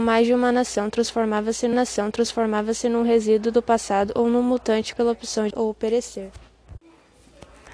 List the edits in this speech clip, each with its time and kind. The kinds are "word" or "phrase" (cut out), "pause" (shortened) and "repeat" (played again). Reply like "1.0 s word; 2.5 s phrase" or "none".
1.7 s repeat; 4.9 s word; 5.5 s word